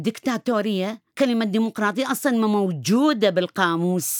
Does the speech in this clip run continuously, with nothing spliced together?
no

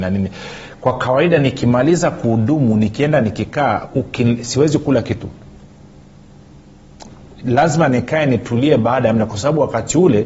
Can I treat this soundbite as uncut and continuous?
yes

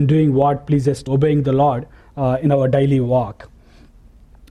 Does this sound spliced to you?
yes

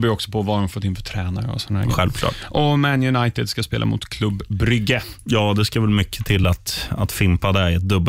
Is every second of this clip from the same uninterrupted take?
yes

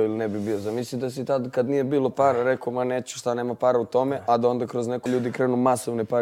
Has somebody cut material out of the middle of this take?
yes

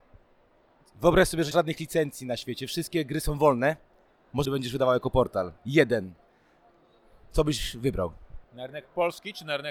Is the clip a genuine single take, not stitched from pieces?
no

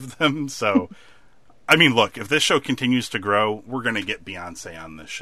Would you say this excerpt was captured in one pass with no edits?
yes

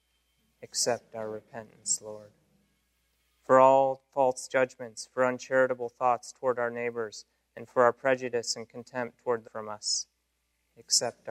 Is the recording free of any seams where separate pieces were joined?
no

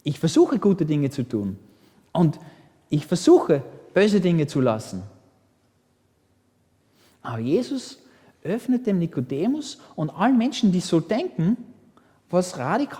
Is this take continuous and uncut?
yes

